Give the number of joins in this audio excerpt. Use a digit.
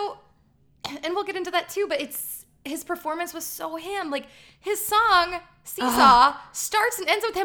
0